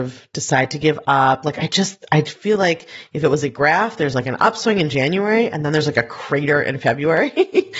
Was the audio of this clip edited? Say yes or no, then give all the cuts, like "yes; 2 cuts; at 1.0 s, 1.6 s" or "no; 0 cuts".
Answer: no; 0 cuts